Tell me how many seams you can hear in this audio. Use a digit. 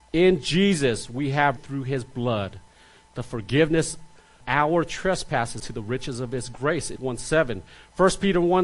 4